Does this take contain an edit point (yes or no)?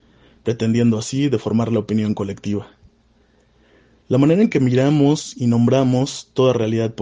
no